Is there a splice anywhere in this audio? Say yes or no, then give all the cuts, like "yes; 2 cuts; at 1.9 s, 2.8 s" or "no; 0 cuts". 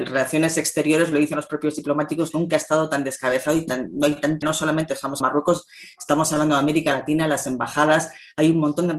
yes; 2 cuts; at 4.4 s, 5.2 s